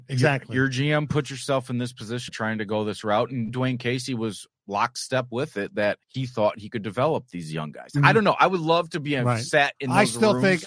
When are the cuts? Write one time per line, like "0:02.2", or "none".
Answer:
0:02.3
0:03.5
0:06.0